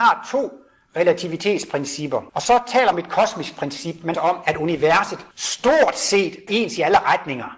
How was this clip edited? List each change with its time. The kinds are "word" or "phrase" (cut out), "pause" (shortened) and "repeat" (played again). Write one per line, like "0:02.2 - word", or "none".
0:02.3 - pause
0:02.9 - phrase
0:04.1 - phrase
0:05.3 - pause
0:06.5 - word